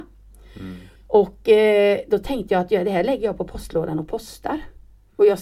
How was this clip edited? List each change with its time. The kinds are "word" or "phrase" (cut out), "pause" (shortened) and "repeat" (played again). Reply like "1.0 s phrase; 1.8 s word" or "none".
1.0 s pause